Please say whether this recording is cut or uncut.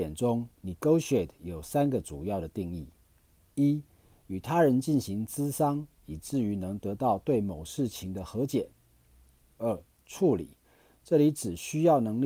uncut